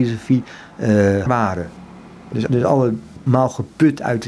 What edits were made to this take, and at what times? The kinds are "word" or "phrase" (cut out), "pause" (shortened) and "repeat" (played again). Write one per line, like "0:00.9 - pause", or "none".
0:01.3 - word
0:02.5 - word